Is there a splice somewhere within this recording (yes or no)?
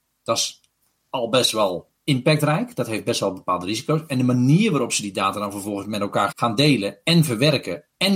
yes